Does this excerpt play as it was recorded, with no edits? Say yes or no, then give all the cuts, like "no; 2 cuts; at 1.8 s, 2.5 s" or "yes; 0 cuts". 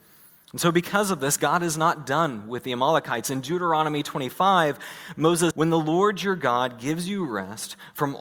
no; 1 cut; at 5.5 s